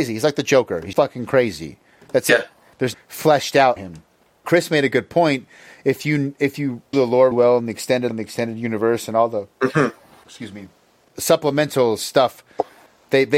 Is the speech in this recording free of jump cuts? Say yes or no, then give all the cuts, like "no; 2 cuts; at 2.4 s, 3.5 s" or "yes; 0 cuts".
no; 8 cuts; at 0.9 s, 2.9 s, 3.8 s, 4.4 s, 6.9 s, 7.3 s, 8.1 s, 11.1 s